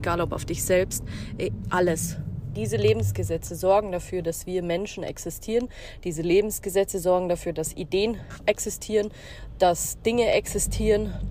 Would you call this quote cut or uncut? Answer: uncut